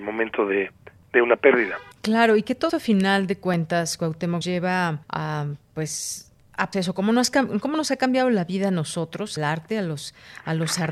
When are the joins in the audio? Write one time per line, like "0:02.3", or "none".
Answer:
0:01.9
0:02.7
0:04.4
0:05.0
0:06.7
0:09.4